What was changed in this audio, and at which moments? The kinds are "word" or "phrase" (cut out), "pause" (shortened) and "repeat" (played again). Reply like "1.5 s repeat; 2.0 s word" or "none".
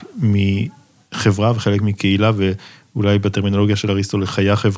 none